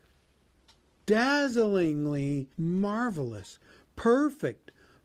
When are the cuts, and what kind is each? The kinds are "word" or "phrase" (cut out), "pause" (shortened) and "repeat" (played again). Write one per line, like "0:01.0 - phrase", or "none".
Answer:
0:02.5 - pause

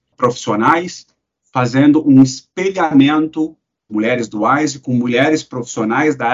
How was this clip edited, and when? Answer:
0:03.9 - phrase

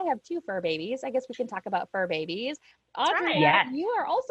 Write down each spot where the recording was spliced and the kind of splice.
none

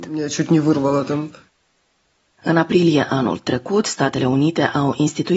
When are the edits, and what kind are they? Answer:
none

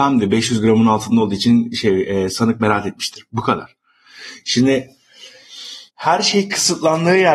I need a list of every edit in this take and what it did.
0:05.9 - pause

